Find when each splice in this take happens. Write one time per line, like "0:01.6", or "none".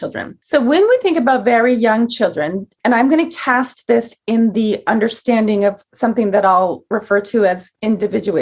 none